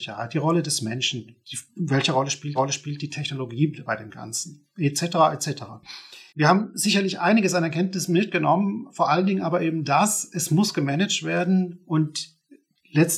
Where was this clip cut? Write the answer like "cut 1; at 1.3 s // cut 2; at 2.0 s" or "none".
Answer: cut 1; at 1.4 s // cut 2; at 2.6 s // cut 3; at 6.3 s

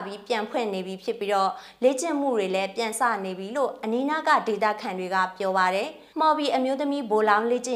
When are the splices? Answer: cut 1; at 6.1 s

